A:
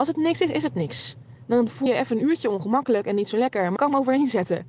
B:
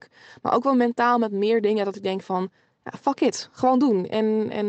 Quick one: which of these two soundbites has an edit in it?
A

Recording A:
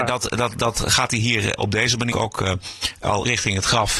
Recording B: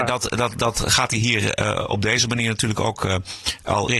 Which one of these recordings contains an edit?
A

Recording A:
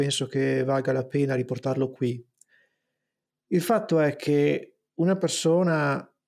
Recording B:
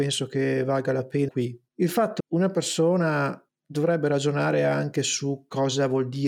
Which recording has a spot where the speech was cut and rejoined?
B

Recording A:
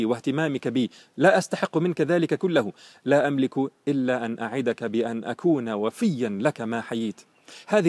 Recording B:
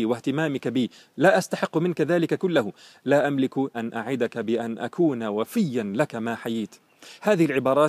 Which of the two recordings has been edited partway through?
B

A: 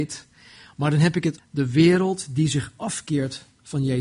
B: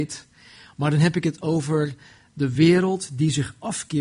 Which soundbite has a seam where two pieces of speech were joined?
A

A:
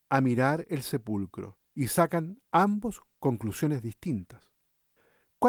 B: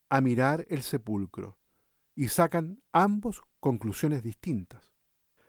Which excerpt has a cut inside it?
A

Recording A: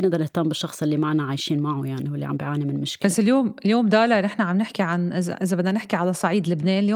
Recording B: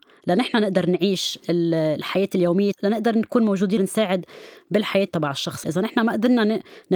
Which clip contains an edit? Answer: B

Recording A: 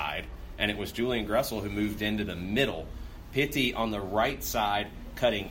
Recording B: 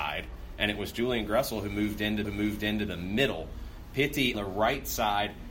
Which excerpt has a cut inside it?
B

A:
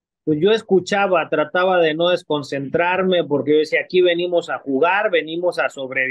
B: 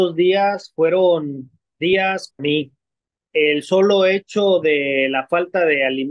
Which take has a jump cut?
B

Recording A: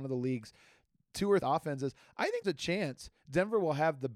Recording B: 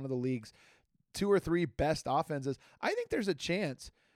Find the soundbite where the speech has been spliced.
A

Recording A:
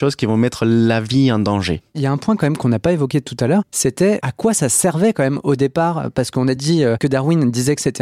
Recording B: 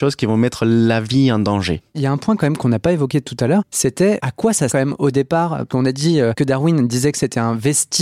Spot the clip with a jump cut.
B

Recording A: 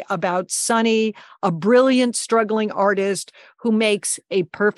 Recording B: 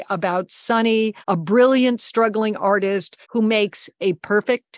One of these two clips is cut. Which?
B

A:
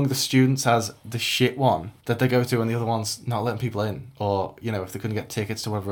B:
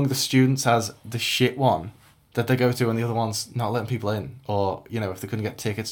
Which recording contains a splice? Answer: A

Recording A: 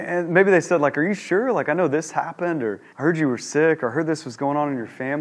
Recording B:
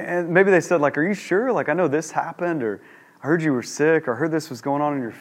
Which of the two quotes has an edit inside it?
A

